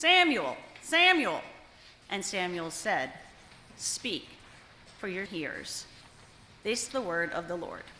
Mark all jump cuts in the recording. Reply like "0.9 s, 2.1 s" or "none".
2.0 s, 5.3 s, 6.9 s